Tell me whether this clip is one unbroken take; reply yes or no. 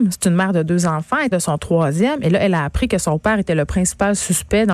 no